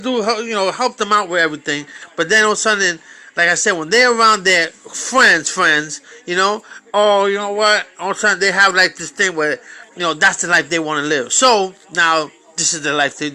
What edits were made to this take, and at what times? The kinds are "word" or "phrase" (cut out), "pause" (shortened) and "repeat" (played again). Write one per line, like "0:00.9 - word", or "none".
0:09.9 - pause
0:11.8 - pause